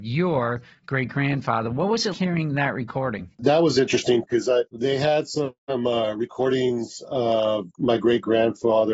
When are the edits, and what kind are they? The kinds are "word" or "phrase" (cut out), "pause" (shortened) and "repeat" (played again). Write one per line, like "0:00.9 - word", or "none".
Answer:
0:02.1 - word
0:03.3 - pause
0:04.2 - word
0:04.7 - pause
0:05.6 - pause
0:07.7 - word